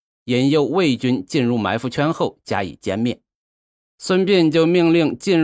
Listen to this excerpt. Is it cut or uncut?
uncut